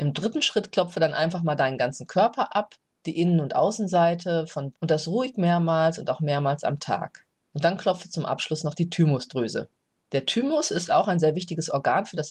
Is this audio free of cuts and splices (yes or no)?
no